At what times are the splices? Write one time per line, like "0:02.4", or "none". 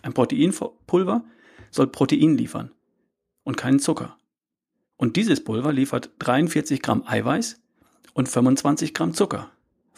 none